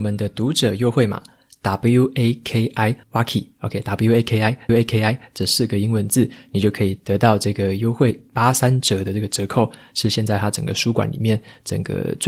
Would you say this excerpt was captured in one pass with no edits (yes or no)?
no